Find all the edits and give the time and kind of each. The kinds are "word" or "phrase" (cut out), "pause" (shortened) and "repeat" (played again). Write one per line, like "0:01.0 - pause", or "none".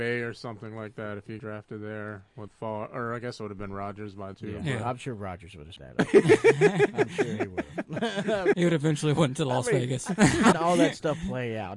0:01.4 - word
0:02.5 - word
0:04.3 - word
0:05.8 - word
0:08.5 - word
0:10.5 - word